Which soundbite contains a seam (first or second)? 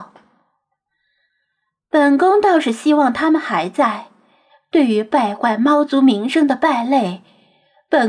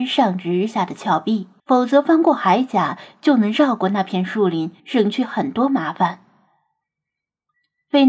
second